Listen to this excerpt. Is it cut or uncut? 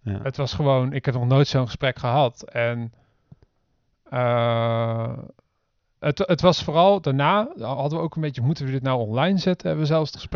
uncut